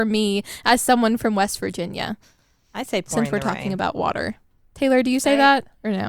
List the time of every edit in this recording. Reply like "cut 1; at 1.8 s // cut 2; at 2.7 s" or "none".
none